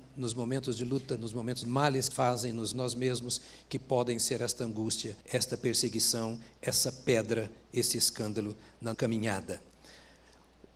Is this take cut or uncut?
cut